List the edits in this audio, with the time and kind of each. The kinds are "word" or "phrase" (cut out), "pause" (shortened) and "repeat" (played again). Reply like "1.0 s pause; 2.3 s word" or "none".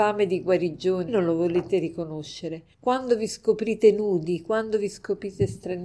1.1 s phrase; 2.7 s pause